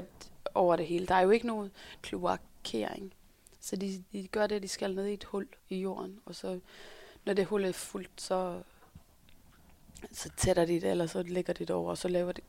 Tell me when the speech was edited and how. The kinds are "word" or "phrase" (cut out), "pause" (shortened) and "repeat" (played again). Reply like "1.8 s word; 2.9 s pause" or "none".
2.0 s phrase; 4.1 s word; 5.6 s pause